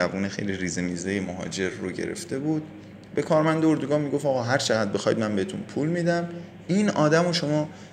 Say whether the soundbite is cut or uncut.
uncut